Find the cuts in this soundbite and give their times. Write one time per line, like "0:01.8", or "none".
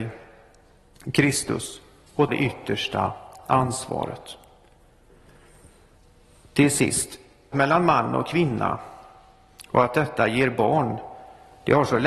0:02.3
0:07.5